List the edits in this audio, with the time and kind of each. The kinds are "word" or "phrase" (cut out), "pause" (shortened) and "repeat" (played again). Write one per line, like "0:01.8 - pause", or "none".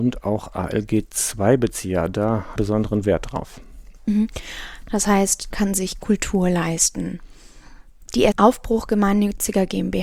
0:02.6 - phrase
0:05.5 - phrase
0:08.3 - word